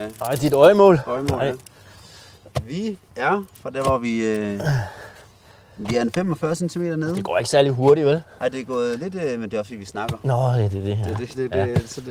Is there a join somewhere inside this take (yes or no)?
no